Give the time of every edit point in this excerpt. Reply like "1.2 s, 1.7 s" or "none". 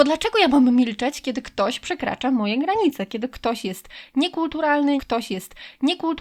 5.0 s